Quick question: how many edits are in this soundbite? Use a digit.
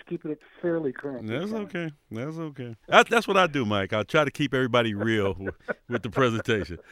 1